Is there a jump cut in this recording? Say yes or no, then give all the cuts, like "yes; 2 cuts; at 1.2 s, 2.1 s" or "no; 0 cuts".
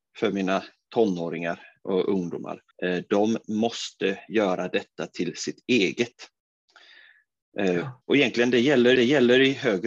yes; 3 cuts; at 2.7 s, 8.0 s, 9.0 s